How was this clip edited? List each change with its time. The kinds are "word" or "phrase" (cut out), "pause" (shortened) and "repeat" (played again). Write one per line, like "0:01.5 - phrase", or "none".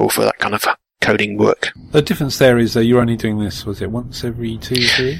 none